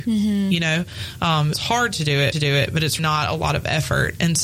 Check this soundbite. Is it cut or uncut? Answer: cut